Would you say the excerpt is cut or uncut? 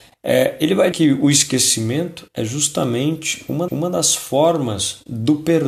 cut